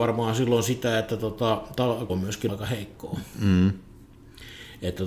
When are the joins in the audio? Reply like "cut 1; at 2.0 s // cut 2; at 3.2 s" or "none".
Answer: cut 1; at 2.1 s // cut 2; at 2.5 s

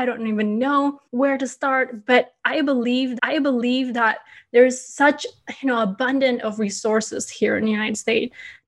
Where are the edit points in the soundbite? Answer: cut 1; at 1.0 s // cut 2; at 3.2 s

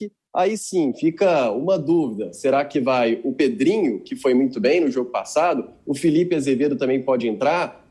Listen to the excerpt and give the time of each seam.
none

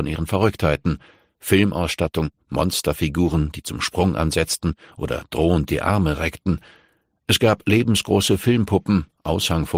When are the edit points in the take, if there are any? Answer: none

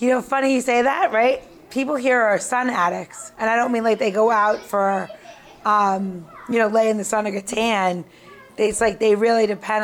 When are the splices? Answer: none

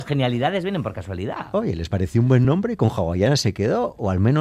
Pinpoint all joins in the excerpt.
none

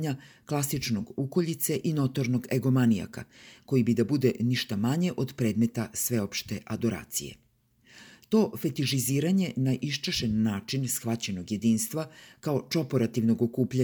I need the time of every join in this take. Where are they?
none

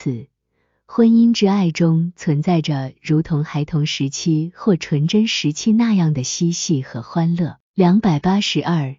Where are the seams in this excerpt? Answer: cut 1; at 7.6 s

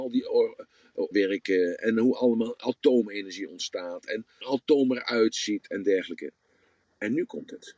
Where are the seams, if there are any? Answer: cut 1; at 1.1 s // cut 2; at 4.4 s

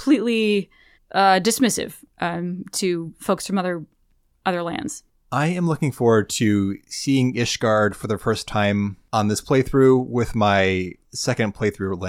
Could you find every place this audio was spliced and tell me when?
cut 1; at 0.9 s // cut 2; at 11.0 s

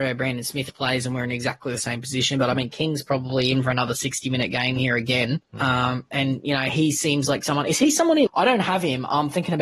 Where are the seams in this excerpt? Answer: cut 1; at 5.5 s // cut 2; at 8.3 s

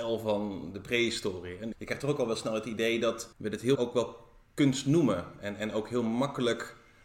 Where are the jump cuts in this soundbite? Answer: cut 1; at 1.7 s // cut 2; at 3.3 s // cut 3; at 3.8 s

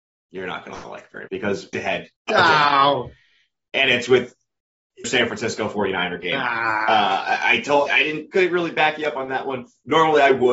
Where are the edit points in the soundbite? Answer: cut 1; at 1.3 s // cut 2; at 1.7 s // cut 3; at 2.2 s // cut 4; at 5.0 s // cut 5; at 7.9 s // cut 6; at 8.3 s

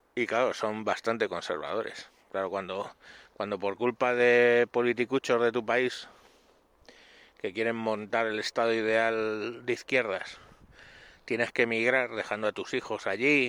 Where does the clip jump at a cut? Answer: none

